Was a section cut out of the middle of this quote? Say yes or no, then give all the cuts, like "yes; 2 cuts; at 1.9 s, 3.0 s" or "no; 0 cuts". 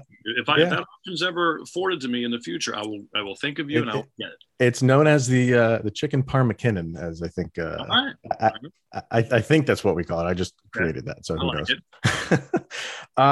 no; 0 cuts